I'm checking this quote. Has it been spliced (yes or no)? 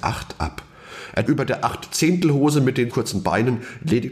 yes